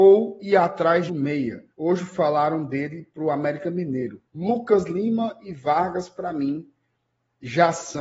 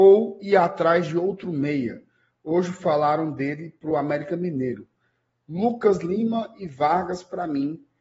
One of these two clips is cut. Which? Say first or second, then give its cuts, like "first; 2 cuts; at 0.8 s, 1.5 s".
first; 3 cuts; at 1.1 s, 1.7 s, 4.3 s